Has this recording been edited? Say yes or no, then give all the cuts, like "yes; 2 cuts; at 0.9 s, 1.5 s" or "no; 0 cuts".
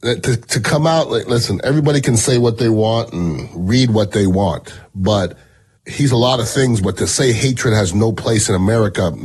no; 0 cuts